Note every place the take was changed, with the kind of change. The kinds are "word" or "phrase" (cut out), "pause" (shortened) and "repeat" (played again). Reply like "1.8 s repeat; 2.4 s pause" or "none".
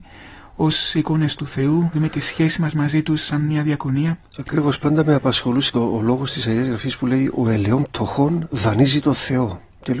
1.9 s word; 5.7 s word